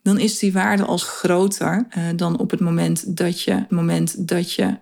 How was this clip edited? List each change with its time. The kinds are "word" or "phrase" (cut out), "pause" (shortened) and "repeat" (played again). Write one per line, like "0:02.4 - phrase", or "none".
0:01.0 - phrase
0:01.9 - pause
0:03.7 - repeat